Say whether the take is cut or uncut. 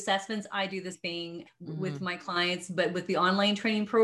cut